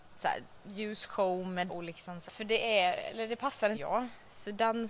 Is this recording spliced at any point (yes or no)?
yes